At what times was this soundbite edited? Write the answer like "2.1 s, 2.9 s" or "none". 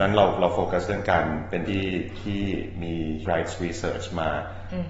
1.6 s, 3.2 s